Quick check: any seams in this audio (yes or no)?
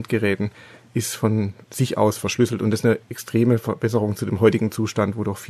no